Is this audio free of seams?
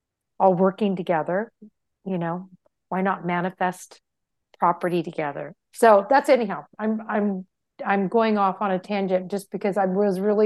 yes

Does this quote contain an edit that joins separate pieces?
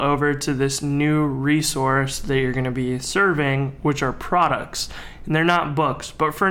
no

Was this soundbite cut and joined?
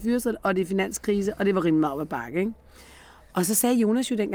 no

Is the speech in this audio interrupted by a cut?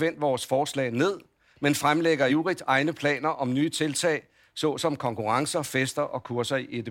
no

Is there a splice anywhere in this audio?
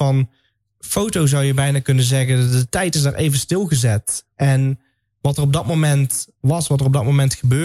no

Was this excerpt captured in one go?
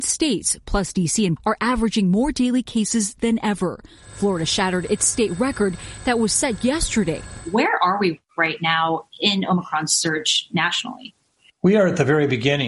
no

